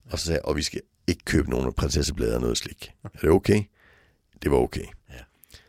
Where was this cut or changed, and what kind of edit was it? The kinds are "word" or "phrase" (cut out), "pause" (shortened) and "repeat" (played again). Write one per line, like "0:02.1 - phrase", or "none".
none